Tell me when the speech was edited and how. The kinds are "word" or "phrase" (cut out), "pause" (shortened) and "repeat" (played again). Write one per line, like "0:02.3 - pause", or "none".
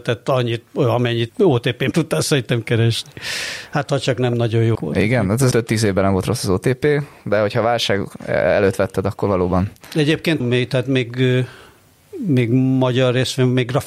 0:01.3 - word
0:01.9 - word
0:04.7 - word
0:05.5 - word
0:10.4 - word